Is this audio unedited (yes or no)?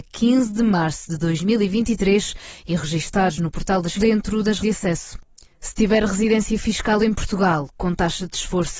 no